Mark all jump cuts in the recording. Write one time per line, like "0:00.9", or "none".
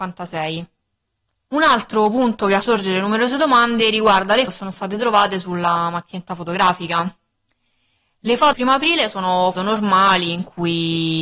0:02.6
0:04.5
0:07.3
0:08.5
0:09.6